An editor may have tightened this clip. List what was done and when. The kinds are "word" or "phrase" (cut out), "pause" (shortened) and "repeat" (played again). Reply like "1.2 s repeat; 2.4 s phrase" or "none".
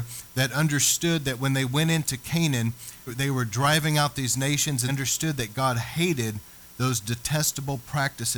3.1 s word; 4.9 s word